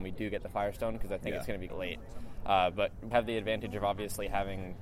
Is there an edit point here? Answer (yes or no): yes